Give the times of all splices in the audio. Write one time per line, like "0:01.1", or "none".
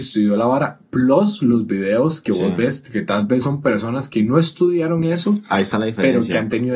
none